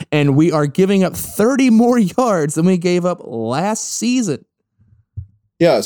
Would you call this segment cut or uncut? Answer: uncut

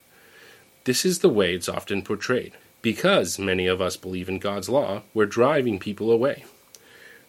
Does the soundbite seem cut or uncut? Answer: cut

